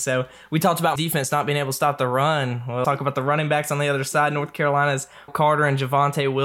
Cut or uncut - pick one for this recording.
cut